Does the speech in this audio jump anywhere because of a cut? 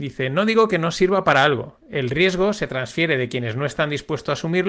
no; 0 cuts

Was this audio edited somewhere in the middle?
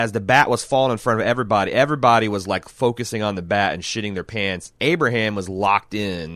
yes; 1 cut; at 4.8 s

